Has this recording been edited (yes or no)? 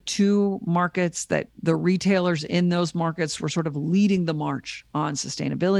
yes